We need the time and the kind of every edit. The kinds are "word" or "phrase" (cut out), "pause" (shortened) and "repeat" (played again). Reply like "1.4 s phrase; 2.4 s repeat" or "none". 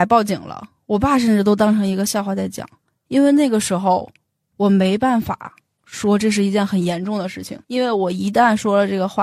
7.6 s pause